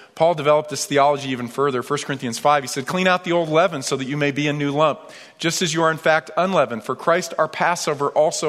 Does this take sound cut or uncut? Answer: uncut